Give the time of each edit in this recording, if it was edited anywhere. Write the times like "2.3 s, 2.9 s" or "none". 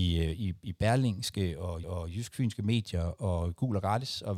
1.8 s